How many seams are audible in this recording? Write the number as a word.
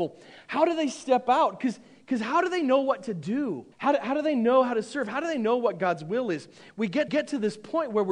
two